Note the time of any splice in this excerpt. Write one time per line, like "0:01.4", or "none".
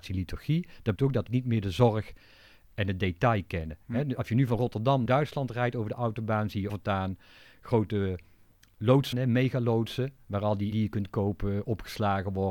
0:01.0
0:01.3
0:05.1
0:06.7
0:09.1
0:10.7